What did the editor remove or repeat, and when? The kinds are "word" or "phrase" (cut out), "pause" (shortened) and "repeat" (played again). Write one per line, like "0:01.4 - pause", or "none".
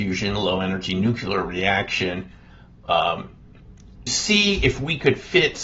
0:04.1 - word